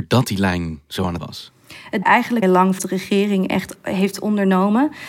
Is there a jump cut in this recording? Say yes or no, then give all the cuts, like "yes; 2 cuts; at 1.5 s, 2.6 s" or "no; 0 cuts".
yes; 5 cuts; at 1.2 s, 2.0 s, 2.4 s, 2.8 s, 3.8 s